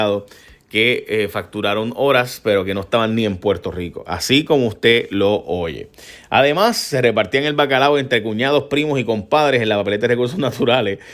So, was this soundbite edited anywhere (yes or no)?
no